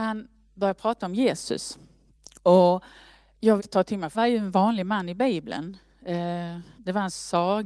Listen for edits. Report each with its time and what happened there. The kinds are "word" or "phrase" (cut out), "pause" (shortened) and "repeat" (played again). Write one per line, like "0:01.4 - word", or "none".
0:02.2 - pause
0:03.6 - word
0:04.1 - word
0:06.8 - pause